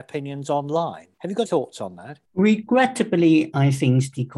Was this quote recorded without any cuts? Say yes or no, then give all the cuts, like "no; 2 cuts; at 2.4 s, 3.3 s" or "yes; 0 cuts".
no; 3 cuts; at 1.1 s, 1.5 s, 2.3 s